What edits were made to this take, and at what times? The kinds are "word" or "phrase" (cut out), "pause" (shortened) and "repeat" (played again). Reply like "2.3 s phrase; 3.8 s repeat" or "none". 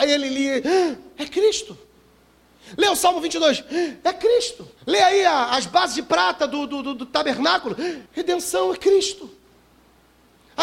4.8 s pause; 8.1 s pause